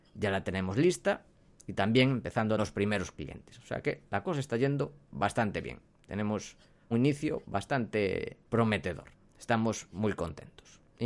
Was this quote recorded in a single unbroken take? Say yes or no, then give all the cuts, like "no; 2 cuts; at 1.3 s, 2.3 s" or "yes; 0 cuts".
no; 3 cuts; at 2.6 s, 6.9 s, 8.5 s